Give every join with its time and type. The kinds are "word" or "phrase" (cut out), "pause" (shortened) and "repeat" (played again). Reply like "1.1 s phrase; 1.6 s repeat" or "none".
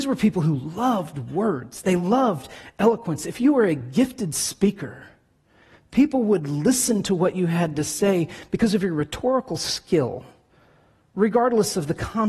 none